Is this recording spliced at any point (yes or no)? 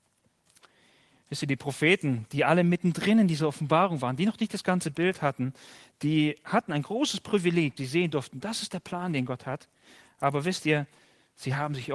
yes